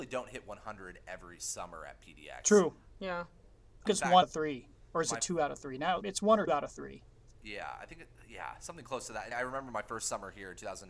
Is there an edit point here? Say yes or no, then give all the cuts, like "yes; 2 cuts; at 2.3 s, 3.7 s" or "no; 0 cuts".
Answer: yes; 5 cuts; at 3.9 s, 4.2 s, 6.0 s, 6.5 s, 9.3 s